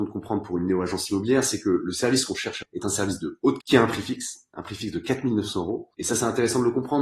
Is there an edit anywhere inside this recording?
yes; 3 cuts; at 2.6 s, 3.6 s, 5.9 s

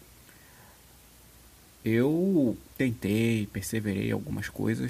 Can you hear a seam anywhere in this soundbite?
yes; 1 cut; at 2.7 s

